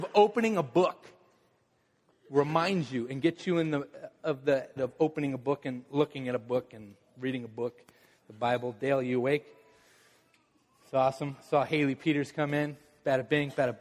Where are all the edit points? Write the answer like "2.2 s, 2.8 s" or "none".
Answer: 4.8 s